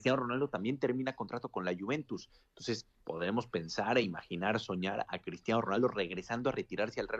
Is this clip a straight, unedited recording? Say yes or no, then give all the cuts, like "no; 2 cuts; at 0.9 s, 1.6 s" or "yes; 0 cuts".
yes; 0 cuts